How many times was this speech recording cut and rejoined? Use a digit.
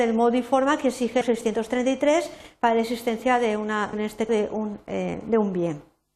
3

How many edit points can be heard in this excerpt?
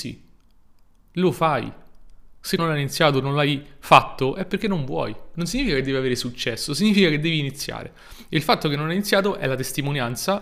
1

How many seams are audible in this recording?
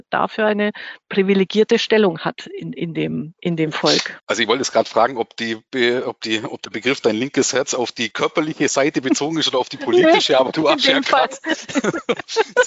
1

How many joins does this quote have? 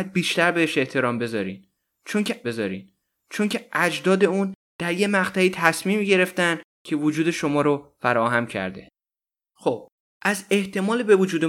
1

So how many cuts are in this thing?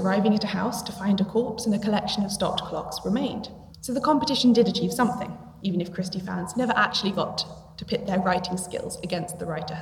1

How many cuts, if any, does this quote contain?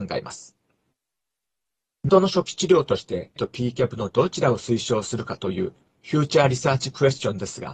2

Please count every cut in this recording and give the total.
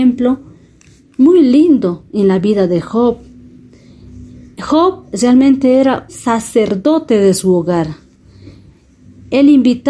1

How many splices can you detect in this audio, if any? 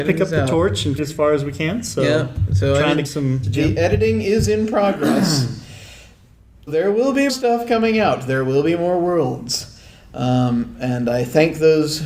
5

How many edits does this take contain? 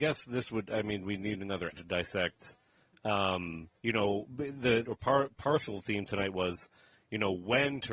3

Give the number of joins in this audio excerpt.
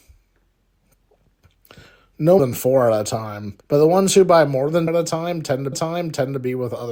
4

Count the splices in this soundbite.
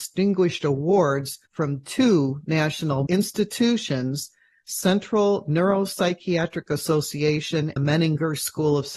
3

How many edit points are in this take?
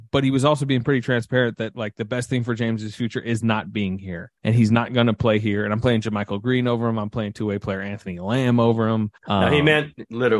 2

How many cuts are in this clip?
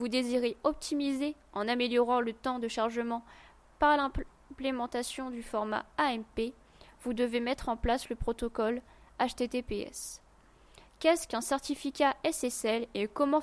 0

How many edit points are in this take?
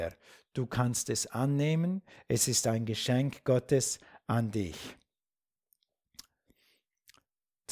0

